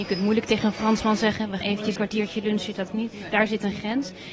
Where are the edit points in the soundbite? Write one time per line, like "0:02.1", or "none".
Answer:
0:01.6
0:02.0
0:02.9